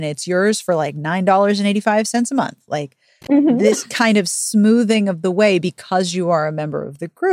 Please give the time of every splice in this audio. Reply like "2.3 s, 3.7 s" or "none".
none